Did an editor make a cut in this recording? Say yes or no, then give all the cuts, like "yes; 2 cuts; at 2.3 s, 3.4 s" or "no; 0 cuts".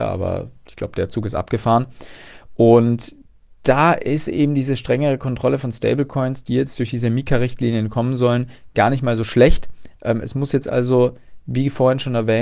no; 0 cuts